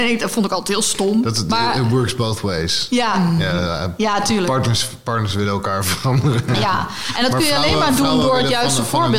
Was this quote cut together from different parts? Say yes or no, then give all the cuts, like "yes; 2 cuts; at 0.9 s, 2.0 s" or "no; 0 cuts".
no; 0 cuts